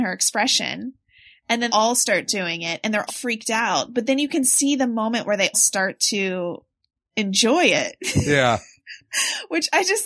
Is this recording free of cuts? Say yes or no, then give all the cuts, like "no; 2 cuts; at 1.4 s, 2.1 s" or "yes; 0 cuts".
no; 3 cuts; at 1.7 s, 3.1 s, 5.5 s